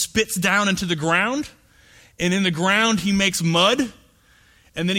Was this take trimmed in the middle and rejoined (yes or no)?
no